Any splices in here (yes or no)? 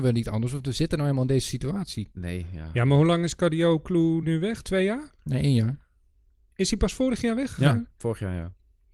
no